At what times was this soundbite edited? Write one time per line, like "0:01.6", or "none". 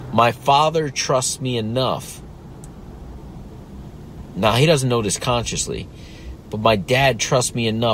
none